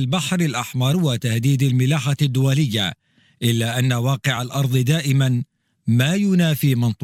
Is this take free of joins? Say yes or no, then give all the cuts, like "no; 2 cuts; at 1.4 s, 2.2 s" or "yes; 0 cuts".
yes; 0 cuts